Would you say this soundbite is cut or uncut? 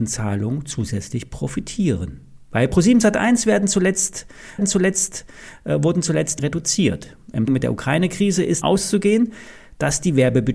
cut